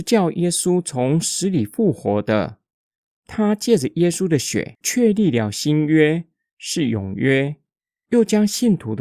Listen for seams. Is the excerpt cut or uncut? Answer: uncut